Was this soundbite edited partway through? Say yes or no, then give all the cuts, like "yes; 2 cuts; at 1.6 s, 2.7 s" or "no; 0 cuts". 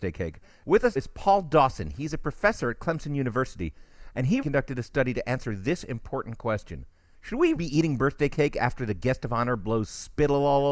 yes; 3 cuts; at 1.0 s, 4.4 s, 7.6 s